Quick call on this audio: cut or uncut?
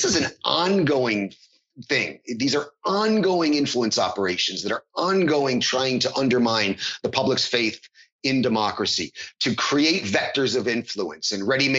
uncut